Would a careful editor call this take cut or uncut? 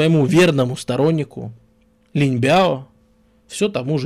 uncut